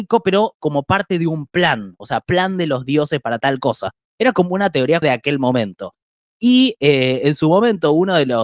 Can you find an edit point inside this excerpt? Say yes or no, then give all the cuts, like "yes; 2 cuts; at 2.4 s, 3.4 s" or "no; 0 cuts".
yes; 1 cut; at 5.0 s